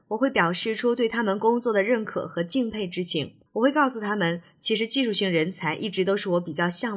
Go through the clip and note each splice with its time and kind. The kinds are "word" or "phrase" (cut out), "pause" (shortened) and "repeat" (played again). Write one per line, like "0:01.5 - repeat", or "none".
0:03.5 - pause